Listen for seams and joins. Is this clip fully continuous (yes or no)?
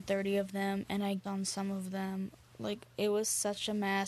no